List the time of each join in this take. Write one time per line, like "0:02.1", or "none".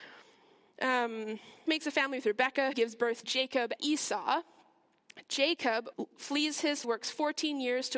0:01.7
0:02.7
0:03.2
0:03.8
0:05.9
0:06.8